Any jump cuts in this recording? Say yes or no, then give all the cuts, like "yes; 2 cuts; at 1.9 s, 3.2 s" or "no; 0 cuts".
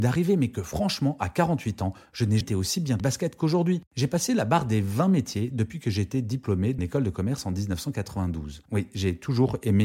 yes; 5 cuts; at 2.4 s, 3.0 s, 3.9 s, 6.8 s, 8.7 s